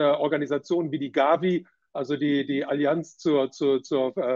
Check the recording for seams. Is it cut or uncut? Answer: uncut